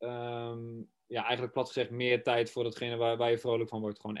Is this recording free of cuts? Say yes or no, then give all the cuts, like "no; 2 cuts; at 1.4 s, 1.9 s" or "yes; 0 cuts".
yes; 0 cuts